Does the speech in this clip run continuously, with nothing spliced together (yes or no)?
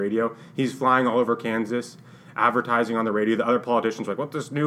yes